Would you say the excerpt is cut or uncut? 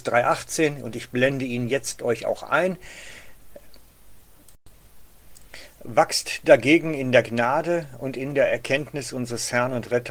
uncut